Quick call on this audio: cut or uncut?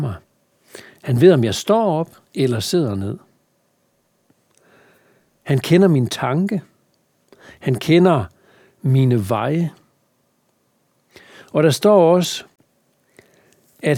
uncut